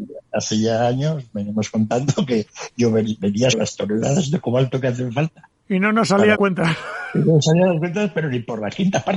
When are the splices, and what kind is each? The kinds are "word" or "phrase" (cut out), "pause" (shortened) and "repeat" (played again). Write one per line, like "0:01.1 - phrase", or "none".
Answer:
0:03.5 - word
0:06.3 - word